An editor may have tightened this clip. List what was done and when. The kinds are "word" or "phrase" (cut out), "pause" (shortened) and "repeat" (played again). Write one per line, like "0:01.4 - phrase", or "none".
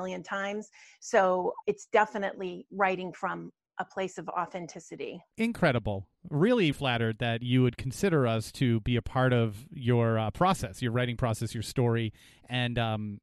0:01.6 - word
0:05.3 - pause
0:06.7 - word

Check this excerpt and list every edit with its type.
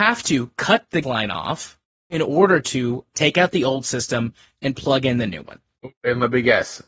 0:01.0 - word

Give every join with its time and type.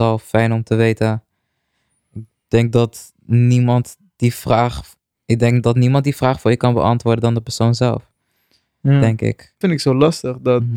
0:09.6 - word

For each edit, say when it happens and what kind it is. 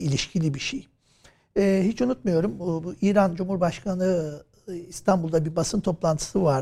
none

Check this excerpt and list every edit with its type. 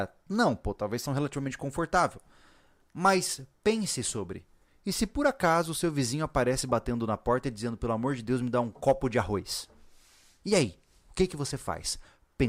0:01.1 - phrase

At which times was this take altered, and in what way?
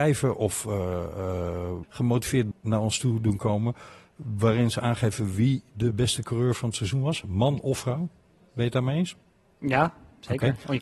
0:01.8 - word
0:02.5 - word

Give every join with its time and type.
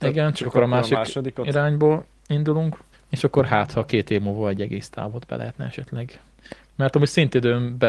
0:02.9 - pause

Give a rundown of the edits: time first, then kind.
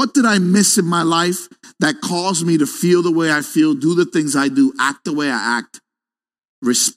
none

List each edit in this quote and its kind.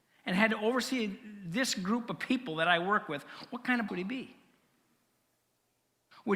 0:03.9 - word

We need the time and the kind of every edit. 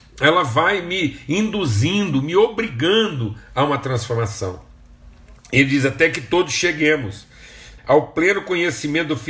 0:07.8 - word

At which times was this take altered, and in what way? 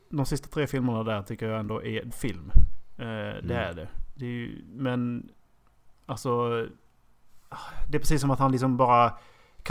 0:02.1 - phrase

